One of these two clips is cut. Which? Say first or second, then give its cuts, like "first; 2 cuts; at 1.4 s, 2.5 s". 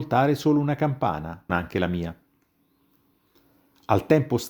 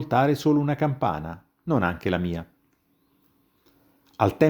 first; 1 cut; at 1.5 s